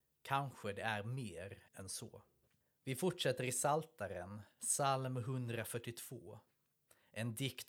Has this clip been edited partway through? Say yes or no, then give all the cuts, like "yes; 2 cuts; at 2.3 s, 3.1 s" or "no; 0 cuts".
yes; 1 cut; at 1.7 s